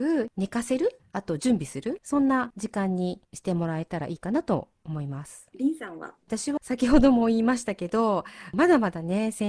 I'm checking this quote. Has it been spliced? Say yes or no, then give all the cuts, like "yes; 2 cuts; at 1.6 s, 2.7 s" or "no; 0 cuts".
yes; 1 cut; at 6.6 s